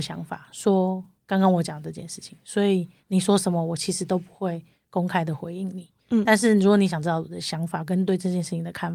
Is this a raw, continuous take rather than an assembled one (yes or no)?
yes